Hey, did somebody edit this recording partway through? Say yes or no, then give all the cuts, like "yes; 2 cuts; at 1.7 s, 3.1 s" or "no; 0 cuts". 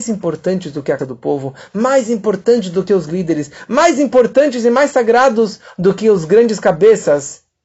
yes; 2 cuts; at 1.0 s, 3.1 s